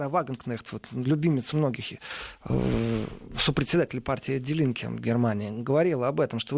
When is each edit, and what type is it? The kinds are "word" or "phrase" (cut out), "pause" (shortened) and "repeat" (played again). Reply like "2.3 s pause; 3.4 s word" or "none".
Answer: 1.5 s word